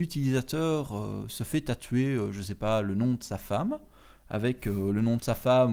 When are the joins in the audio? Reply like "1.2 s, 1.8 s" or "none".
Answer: none

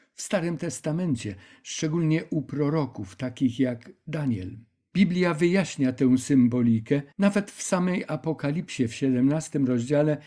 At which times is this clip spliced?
7.1 s

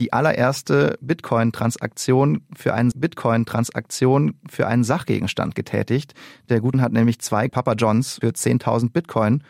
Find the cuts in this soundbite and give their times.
2.9 s, 6.7 s, 7.5 s, 8.2 s

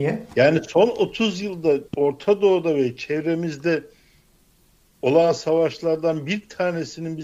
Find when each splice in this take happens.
1.9 s

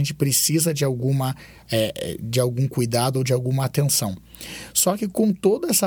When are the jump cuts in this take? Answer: none

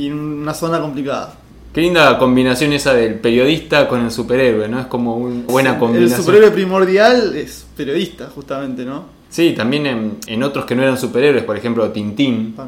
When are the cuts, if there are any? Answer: 5.5 s, 9.2 s, 10.3 s

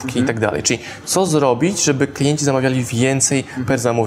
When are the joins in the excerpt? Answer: none

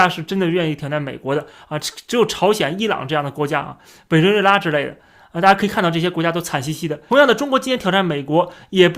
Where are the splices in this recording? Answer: none

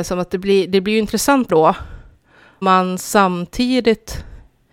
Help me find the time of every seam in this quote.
1.5 s, 2.6 s

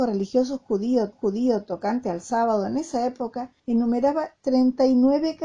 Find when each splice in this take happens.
1.1 s, 3.6 s

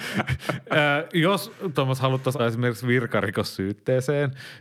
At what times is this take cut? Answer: 1.7 s, 2.4 s

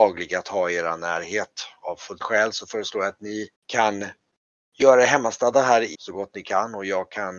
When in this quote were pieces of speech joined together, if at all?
2.2 s, 3.6 s, 5.9 s

